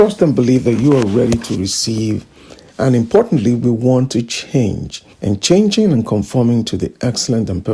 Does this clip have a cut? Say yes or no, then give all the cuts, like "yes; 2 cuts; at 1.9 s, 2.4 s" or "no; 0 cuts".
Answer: yes; 1 cut; at 5.1 s